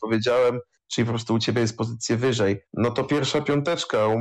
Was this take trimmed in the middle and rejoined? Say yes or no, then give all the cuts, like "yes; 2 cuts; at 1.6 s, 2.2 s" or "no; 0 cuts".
yes; 1 cut; at 2.7 s